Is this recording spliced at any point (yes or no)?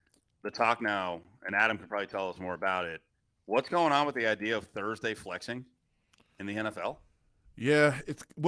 no